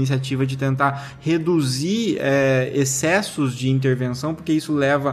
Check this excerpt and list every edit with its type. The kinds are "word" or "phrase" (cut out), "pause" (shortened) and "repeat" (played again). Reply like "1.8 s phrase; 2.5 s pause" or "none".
none